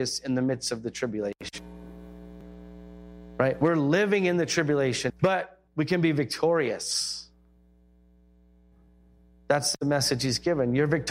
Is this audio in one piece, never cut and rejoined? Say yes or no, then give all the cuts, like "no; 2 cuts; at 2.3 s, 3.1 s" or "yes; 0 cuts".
no; 2 cuts; at 5.1 s, 5.7 s